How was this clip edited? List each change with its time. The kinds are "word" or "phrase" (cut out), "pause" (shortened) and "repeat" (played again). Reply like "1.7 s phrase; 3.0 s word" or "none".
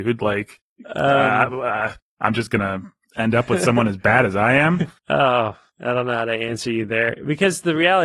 5.0 s pause